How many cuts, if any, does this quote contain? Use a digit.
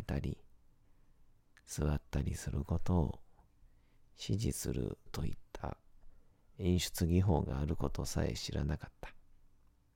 1